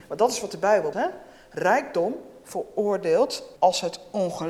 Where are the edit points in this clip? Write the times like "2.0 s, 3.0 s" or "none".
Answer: 0.9 s, 3.6 s